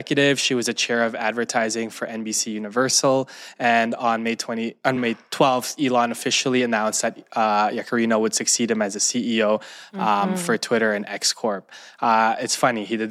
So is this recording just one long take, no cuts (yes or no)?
yes